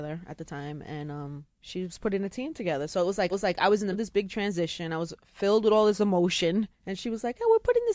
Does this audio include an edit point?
yes; 4 cuts; at 1.5 s, 3.3 s, 3.9 s, 6.7 s

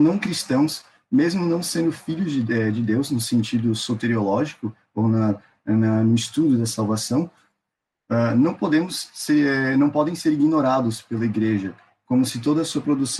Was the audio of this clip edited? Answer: no; 0 cuts

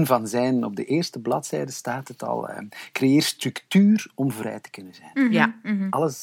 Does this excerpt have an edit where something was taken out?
no; 0 cuts

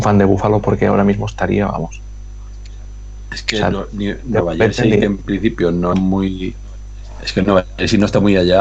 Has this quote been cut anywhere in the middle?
yes; 1 cut; at 5.9 s

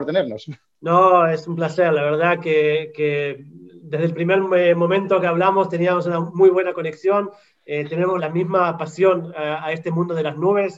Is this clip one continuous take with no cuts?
no; 1 cut; at 8.2 s

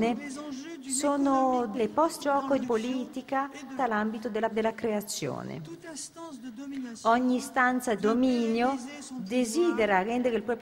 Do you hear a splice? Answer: yes; 6 cuts; at 1.7 s, 2.2 s, 2.6 s, 3.8 s, 4.5 s, 8.0 s

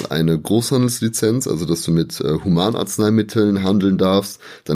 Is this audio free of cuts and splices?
yes; 0 cuts

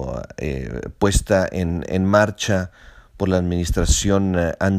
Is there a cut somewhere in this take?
no; 0 cuts

